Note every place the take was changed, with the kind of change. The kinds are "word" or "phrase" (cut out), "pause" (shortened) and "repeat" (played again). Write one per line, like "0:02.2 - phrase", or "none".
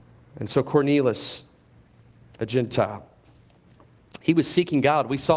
none